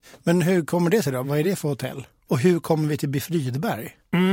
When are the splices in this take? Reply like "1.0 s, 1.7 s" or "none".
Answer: none